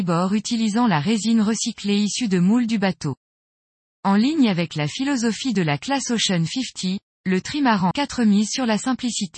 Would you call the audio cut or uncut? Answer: cut